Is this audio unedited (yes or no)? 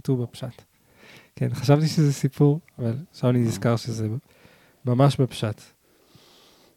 yes